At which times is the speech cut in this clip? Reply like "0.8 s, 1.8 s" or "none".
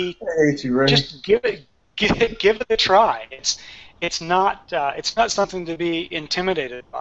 none